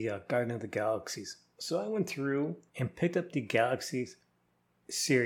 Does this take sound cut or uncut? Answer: cut